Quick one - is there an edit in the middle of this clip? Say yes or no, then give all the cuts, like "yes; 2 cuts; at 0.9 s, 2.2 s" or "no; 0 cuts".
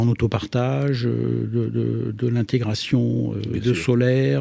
no; 0 cuts